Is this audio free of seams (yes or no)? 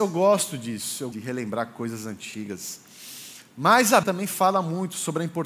no